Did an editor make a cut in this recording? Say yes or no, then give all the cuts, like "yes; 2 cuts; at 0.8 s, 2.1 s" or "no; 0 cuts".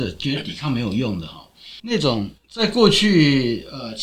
yes; 2 cuts; at 1.8 s, 2.4 s